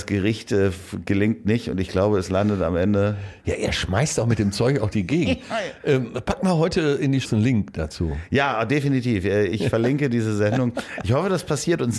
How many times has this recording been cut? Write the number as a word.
three